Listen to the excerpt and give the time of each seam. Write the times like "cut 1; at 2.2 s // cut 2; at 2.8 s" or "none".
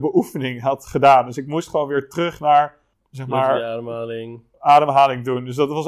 none